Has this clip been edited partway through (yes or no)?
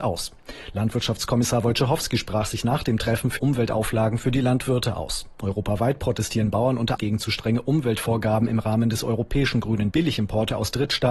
yes